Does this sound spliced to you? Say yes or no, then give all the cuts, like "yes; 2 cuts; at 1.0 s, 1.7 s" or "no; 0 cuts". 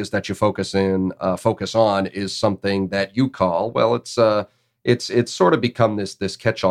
no; 0 cuts